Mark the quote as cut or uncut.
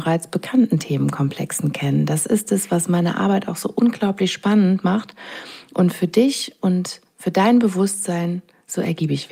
uncut